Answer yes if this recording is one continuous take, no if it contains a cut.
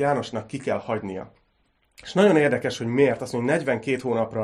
yes